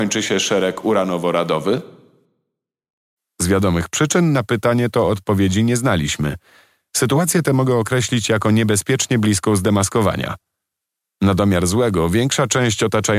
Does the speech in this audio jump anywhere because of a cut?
no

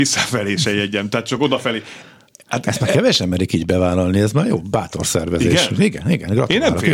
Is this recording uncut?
yes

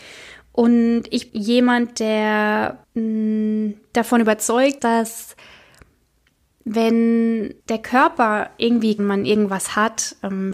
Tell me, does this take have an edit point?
yes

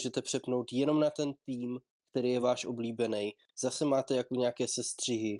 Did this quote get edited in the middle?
no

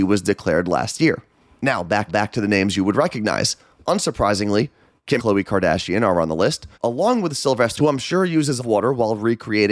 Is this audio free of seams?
no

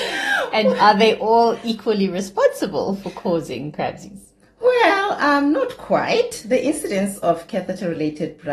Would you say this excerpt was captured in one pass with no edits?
yes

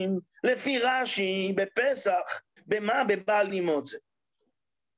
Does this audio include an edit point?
yes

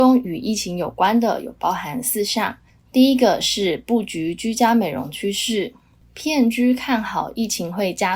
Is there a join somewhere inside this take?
no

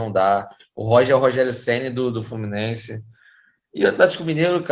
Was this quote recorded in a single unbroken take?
yes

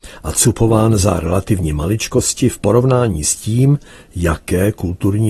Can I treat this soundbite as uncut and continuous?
yes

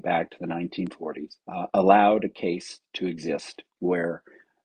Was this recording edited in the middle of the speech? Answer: yes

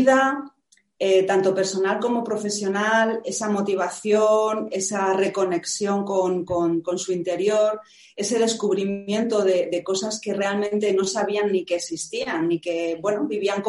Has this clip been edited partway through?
no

